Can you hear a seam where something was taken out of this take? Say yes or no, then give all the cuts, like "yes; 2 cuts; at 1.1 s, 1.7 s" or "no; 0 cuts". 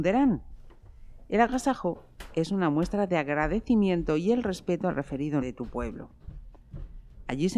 yes; 1 cut; at 5.4 s